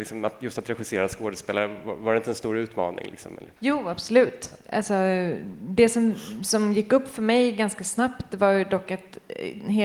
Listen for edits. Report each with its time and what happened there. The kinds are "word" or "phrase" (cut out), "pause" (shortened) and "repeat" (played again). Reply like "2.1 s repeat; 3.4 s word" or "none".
3.6 s pause